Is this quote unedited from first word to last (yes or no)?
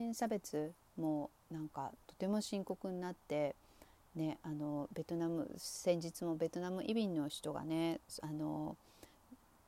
yes